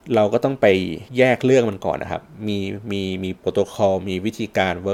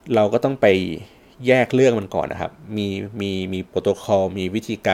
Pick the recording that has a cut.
first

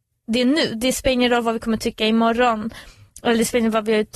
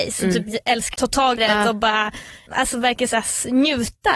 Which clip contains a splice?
second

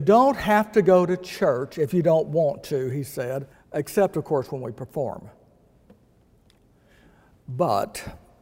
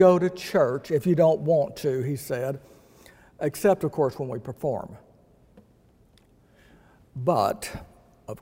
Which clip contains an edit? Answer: first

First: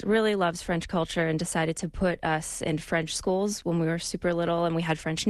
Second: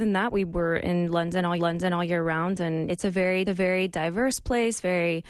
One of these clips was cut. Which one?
second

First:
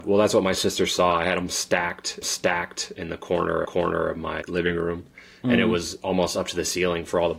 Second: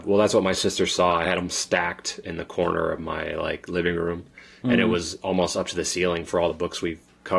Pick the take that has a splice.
first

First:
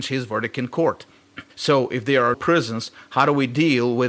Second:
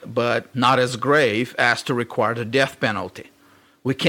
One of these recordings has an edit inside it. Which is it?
first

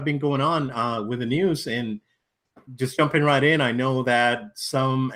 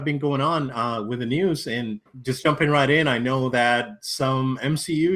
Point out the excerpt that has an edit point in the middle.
second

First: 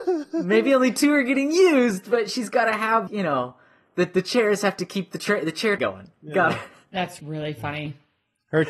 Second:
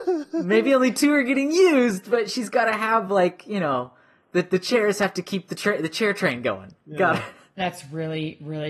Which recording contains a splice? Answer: first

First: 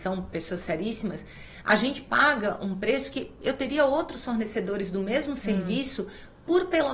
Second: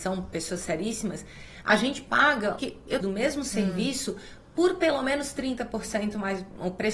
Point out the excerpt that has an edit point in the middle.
second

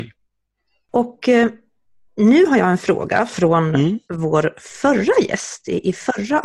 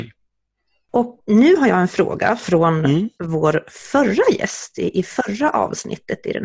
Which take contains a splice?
second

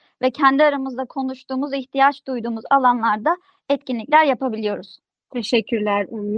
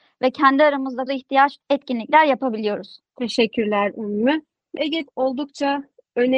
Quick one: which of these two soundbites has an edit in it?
second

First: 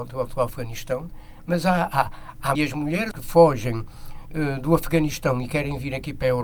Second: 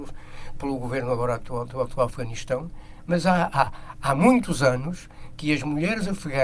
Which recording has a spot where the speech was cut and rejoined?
first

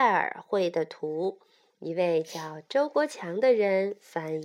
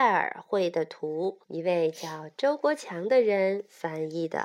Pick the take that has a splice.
second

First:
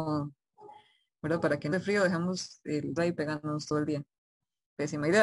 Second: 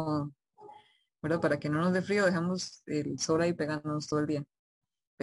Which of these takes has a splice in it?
first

